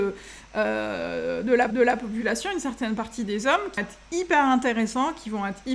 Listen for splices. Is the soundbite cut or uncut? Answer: cut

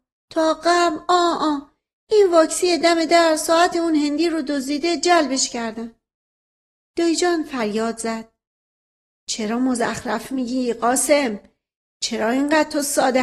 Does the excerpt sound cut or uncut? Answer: uncut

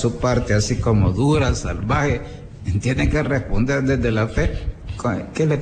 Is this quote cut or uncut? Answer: uncut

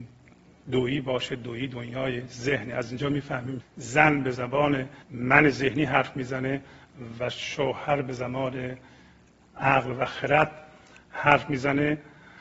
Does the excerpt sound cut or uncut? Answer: cut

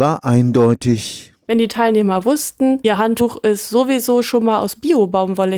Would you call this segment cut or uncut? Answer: uncut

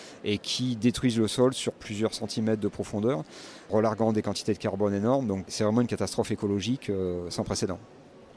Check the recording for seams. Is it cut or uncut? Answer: uncut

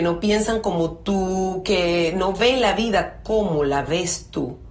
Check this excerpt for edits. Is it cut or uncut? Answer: uncut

